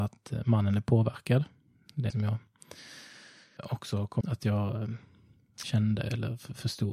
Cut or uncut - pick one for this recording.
cut